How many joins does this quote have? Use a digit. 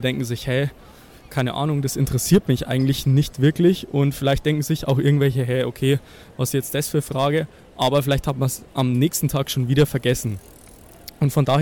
0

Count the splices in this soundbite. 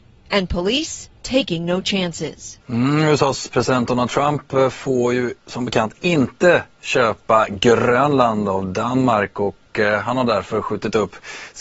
2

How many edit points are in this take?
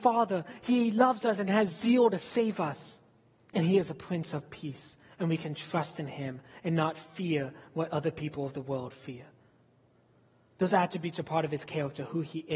0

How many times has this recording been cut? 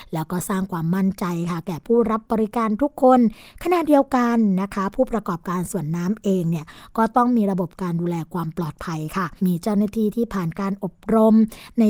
1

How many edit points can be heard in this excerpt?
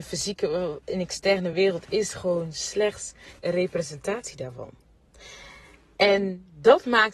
0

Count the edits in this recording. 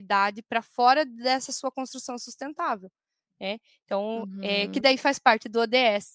0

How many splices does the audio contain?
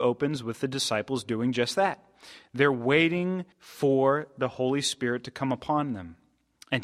1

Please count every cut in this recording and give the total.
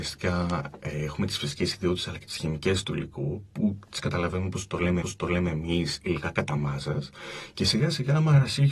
1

